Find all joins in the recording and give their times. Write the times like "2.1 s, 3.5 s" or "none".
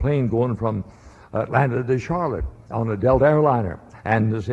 none